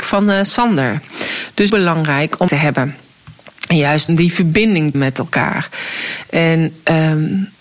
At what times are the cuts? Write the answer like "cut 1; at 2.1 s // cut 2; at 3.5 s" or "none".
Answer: cut 1; at 1.7 s // cut 2; at 2.5 s // cut 3; at 4.1 s // cut 4; at 4.9 s